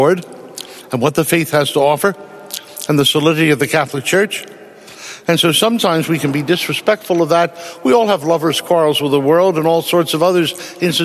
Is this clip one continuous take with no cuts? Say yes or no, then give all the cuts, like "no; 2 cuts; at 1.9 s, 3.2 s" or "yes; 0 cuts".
yes; 0 cuts